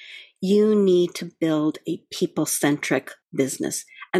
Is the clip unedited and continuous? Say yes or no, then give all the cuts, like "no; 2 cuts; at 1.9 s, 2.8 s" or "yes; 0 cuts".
no; 1 cut; at 3.2 s